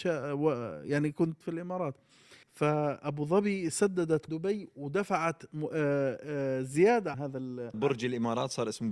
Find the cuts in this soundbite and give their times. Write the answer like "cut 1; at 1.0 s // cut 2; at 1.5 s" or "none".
cut 1; at 1.4 s // cut 2; at 2.4 s // cut 3; at 4.3 s // cut 4; at 7.1 s // cut 5; at 7.7 s